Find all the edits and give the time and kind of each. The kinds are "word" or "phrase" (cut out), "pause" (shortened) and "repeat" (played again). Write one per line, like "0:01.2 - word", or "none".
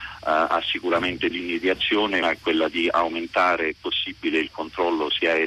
0:01.3 - word
0:02.2 - word
0:03.8 - word